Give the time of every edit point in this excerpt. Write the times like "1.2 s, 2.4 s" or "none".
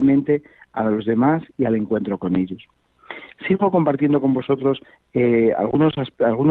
none